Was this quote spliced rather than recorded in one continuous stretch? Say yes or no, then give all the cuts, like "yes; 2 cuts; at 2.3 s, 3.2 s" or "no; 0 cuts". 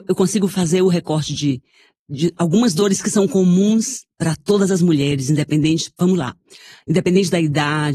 no; 0 cuts